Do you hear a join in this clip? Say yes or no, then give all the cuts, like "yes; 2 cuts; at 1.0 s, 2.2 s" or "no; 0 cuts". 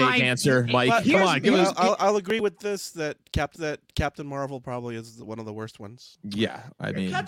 yes; 2 cuts; at 3.6 s, 6.2 s